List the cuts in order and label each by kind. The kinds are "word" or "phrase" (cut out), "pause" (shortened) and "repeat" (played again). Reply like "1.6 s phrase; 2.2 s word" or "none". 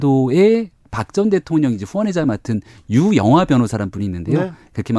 none